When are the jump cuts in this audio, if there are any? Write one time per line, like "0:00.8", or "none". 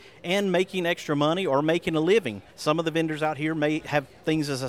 0:02.5